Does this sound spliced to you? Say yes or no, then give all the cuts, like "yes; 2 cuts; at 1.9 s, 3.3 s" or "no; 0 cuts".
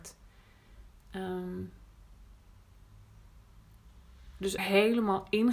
yes; 1 cut; at 4.6 s